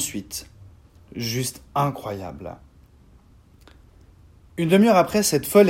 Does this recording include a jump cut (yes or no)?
no